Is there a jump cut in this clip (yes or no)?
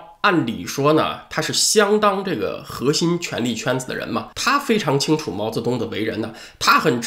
yes